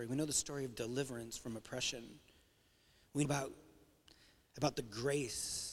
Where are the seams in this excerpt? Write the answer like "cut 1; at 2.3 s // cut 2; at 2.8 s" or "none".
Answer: cut 1; at 3.2 s